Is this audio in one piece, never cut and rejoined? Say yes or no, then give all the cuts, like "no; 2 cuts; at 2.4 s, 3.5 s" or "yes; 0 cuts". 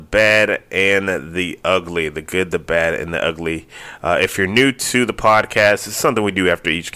yes; 0 cuts